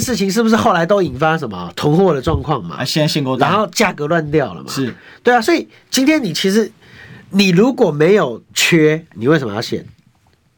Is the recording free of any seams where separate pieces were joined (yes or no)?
yes